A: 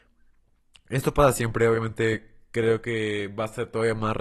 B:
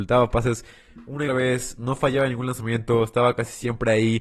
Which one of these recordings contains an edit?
B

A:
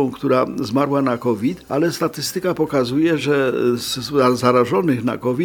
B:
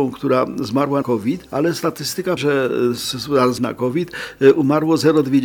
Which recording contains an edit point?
B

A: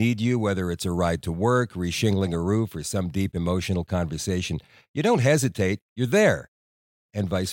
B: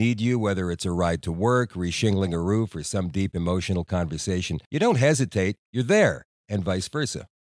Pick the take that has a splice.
B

